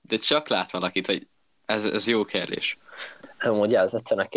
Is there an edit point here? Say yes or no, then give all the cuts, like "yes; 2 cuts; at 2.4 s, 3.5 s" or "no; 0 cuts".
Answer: no; 0 cuts